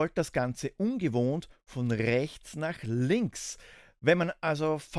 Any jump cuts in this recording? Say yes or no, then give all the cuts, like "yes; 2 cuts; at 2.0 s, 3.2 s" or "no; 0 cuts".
no; 0 cuts